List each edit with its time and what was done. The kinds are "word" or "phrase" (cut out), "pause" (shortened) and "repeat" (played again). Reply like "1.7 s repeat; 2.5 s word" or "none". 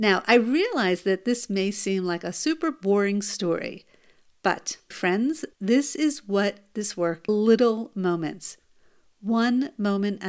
4.9 s word; 5.5 s pause; 7.3 s phrase